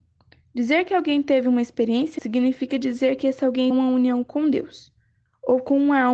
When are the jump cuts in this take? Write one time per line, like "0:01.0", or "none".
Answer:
0:02.2
0:03.7